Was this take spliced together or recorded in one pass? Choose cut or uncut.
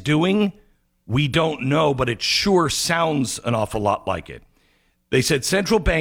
uncut